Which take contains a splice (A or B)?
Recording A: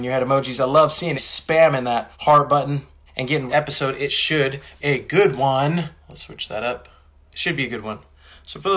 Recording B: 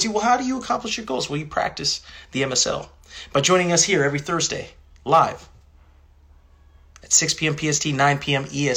A